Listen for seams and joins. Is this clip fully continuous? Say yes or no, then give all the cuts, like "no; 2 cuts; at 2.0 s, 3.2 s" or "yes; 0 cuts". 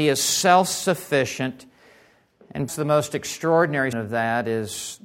no; 2 cuts; at 2.7 s, 3.9 s